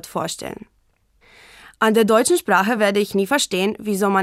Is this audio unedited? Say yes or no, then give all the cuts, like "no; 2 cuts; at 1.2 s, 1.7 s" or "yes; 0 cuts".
yes; 0 cuts